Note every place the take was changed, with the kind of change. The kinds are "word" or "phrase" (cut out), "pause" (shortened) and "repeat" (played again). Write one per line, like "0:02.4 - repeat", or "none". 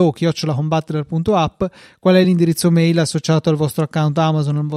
none